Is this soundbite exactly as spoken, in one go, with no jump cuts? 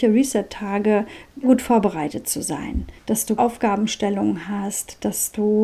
no; 3 cuts; at 1.4 s, 3.0 s, 3.4 s

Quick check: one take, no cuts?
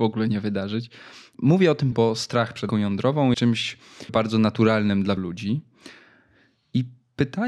no; 5 cuts; at 1.9 s, 2.7 s, 3.3 s, 4.1 s, 5.2 s

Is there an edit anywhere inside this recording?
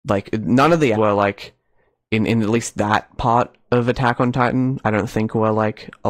yes; 1 cut; at 0.9 s

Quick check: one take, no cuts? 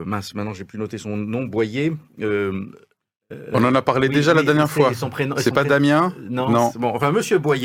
yes; 0 cuts

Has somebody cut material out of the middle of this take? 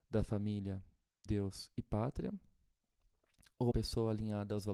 yes; 2 cuts; at 1.3 s, 3.7 s

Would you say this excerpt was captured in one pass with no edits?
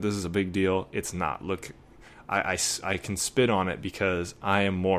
yes; 0 cuts

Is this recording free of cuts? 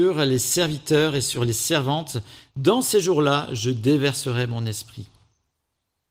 yes; 0 cuts

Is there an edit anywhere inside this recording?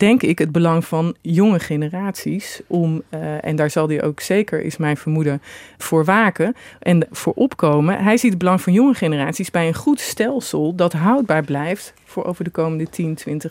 no; 0 cuts

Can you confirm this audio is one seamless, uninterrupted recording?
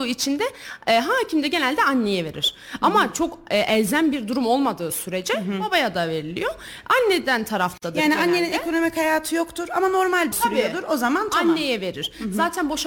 no; 1 cut; at 10.3 s

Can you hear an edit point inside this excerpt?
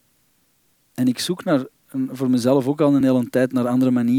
no; 0 cuts

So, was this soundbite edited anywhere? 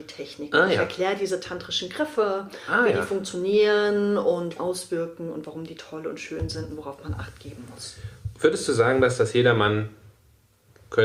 yes; 1 cut; at 4.6 s

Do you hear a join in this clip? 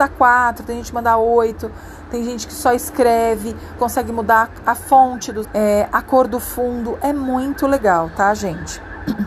yes; 2 cuts; at 3.8 s, 5.4 s

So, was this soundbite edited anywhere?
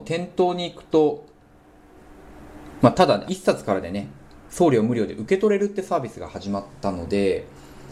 yes; 1 cut; at 3.3 s

